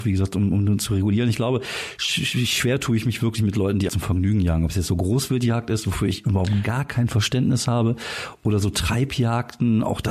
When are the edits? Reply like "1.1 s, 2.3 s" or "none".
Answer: 3.9 s